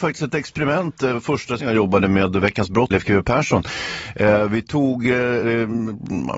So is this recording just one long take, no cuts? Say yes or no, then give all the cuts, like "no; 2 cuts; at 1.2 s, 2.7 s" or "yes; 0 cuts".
no; 2 cuts; at 1.6 s, 2.9 s